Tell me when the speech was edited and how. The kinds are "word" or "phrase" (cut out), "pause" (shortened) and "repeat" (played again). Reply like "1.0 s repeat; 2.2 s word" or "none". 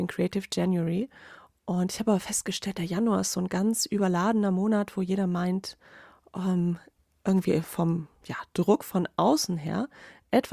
none